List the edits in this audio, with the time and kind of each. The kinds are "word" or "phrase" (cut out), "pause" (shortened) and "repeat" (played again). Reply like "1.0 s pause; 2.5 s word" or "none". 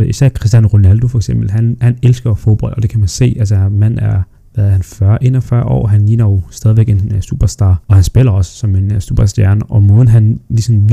4.4 s pause; 7.8 s pause